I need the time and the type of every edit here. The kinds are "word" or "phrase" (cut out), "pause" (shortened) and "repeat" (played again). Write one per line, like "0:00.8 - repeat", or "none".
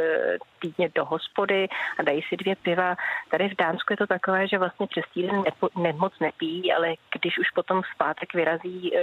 none

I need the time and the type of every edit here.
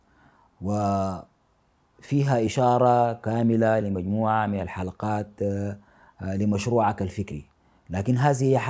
none

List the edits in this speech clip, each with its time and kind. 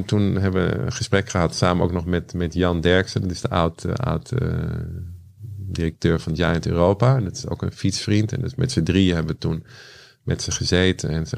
none

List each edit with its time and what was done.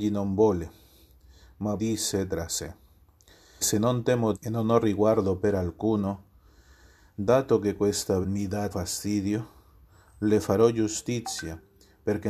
0:01.8 - word
0:03.6 - word
0:04.3 - word
0:08.2 - word
0:08.7 - word

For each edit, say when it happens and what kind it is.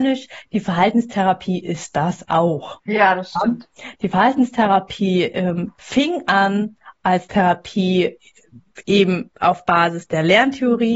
none

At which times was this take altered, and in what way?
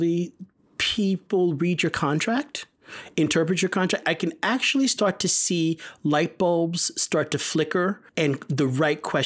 0:08.1 - pause

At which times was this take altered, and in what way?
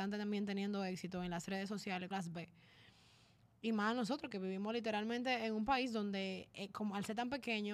0:02.1 - phrase

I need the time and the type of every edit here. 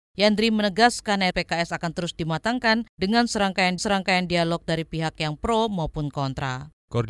0:01.3 - word
0:03.8 - repeat

